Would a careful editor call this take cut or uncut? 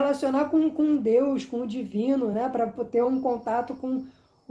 uncut